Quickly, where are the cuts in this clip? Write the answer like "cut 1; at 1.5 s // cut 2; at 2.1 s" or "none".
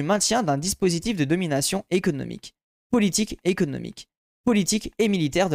cut 1; at 3.4 s